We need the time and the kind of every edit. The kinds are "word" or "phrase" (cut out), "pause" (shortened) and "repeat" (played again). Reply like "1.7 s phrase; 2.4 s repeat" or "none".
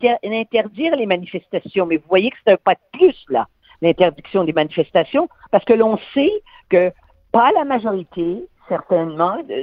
none